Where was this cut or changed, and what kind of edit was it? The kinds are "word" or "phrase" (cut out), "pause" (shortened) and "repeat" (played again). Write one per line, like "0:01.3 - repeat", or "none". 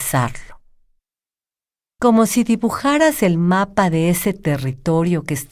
none